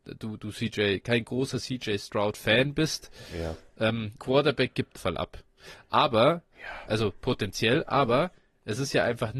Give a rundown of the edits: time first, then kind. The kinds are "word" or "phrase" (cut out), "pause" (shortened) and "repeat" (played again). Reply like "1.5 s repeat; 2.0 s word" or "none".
4.2 s phrase; 5.0 s phrase